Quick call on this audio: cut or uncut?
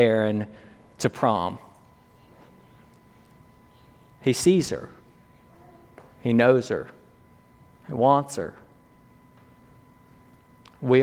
uncut